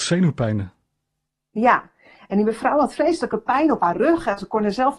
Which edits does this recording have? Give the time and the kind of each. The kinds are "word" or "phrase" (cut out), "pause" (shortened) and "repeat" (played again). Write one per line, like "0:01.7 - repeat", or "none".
none